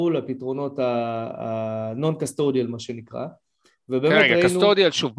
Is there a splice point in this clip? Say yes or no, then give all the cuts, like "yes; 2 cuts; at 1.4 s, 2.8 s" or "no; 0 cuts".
no; 0 cuts